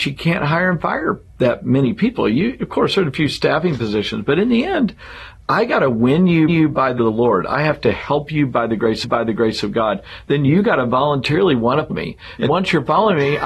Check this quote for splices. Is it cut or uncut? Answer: cut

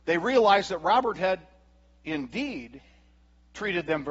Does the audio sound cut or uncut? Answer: uncut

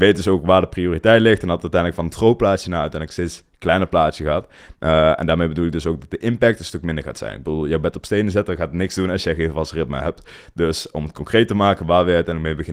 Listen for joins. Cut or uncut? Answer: uncut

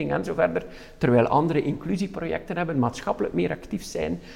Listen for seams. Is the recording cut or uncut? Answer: uncut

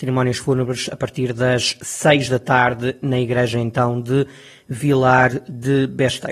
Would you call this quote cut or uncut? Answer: uncut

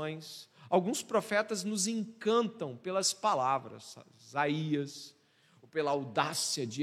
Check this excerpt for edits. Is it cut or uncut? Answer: uncut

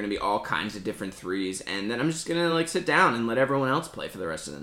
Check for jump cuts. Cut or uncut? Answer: uncut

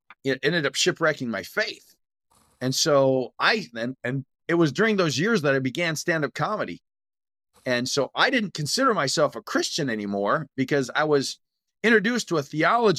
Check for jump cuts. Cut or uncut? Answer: uncut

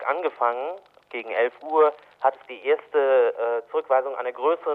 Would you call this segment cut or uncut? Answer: uncut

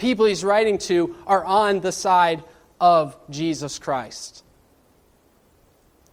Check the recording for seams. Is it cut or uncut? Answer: uncut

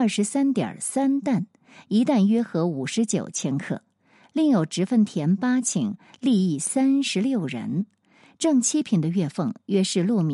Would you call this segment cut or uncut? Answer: uncut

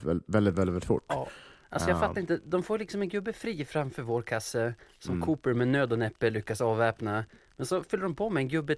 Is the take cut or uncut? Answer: uncut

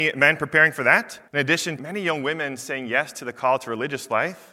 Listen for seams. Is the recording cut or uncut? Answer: cut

